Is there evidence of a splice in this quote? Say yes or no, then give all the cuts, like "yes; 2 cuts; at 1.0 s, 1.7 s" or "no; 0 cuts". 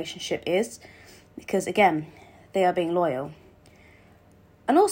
no; 0 cuts